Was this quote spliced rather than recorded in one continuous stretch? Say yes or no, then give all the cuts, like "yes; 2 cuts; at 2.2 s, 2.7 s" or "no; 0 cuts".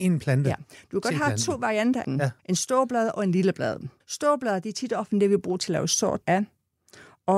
yes; 4 cuts; at 2.0 s, 2.4 s, 4.0 s, 6.2 s